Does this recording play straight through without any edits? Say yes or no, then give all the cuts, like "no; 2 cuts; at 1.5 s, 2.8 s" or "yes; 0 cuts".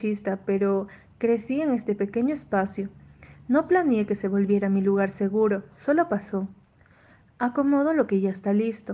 yes; 0 cuts